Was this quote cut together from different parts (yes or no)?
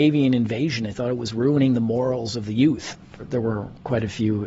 no